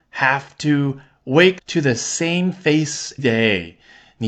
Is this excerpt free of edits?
no; 2 cuts; at 1.6 s, 3.2 s

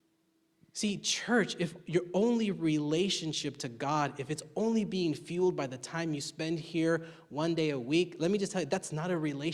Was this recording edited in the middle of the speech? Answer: no; 0 cuts

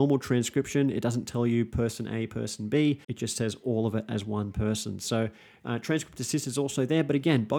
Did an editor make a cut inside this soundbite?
yes; 1 cut; at 3.0 s

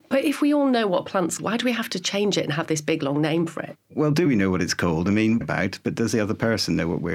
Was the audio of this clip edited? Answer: yes; 2 cuts; at 1.4 s, 5.4 s

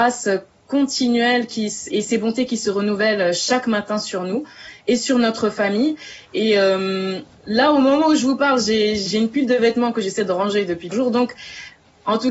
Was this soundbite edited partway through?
yes; 4 cuts; at 1.9 s, 7.3 s, 9.1 s, 10.9 s

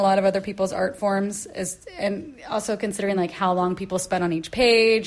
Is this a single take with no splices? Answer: yes; 0 cuts

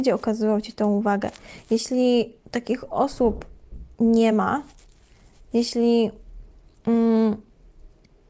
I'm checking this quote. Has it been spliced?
no; 0 cuts

